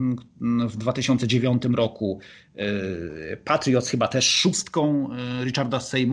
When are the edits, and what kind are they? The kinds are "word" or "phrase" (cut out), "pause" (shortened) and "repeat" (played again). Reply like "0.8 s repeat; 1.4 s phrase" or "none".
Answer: none